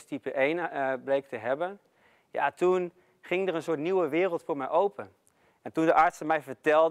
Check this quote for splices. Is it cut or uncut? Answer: uncut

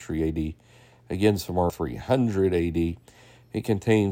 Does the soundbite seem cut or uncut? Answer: cut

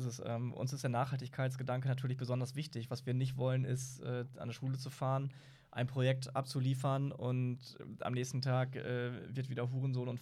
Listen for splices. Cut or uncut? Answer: uncut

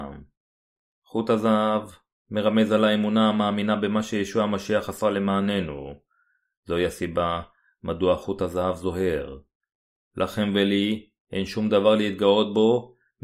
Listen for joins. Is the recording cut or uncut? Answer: uncut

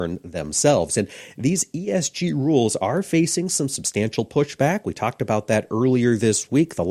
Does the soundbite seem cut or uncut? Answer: uncut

